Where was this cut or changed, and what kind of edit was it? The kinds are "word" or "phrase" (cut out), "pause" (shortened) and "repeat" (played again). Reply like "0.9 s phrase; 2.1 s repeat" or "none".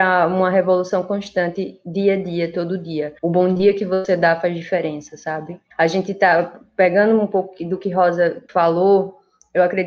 3.2 s pause; 5.7 s pause; 8.5 s pause